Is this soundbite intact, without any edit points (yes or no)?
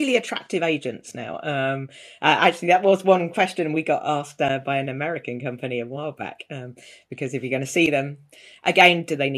yes